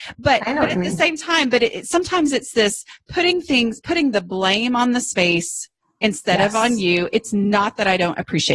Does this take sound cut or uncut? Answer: uncut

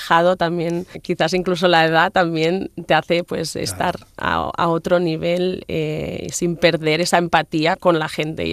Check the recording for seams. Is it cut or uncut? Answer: uncut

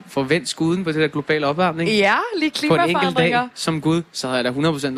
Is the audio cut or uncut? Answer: uncut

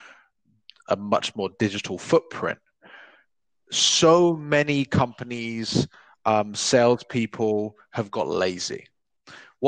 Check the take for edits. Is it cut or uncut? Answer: uncut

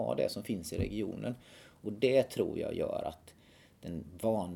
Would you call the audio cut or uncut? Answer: uncut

